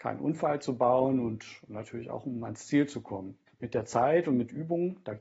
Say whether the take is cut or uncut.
cut